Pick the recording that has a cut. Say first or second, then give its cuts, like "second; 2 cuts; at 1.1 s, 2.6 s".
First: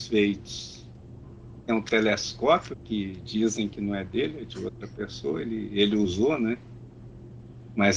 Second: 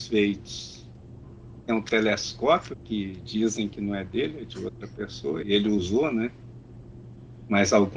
second; 1 cut; at 5.4 s